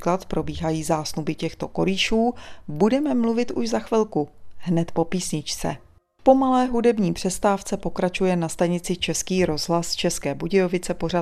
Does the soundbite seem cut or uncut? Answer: uncut